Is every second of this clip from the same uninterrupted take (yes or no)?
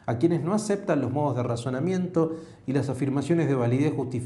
yes